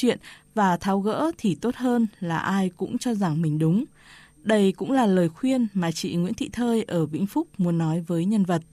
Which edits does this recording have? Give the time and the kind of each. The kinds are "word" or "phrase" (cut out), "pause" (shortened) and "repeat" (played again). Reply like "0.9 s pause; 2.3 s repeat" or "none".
none